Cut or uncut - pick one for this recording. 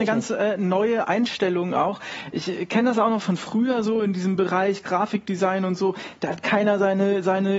uncut